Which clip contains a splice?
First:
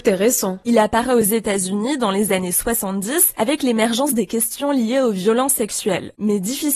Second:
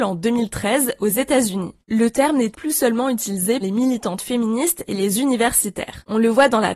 second; 2 cuts; at 2.5 s, 3.6 s

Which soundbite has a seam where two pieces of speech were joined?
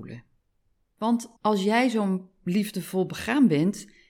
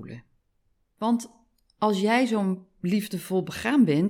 first; 1 cut; at 1.4 s

